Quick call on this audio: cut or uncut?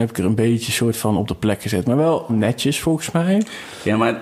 cut